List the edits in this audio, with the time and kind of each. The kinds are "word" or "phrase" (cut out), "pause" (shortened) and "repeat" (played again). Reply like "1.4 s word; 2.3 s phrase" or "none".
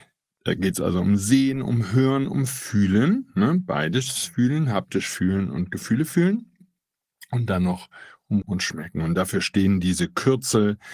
8.4 s word